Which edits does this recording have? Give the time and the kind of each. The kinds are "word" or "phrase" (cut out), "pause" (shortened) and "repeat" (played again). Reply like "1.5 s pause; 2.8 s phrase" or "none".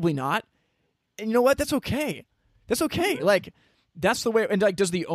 none